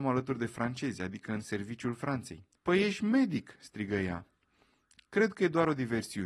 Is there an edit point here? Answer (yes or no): yes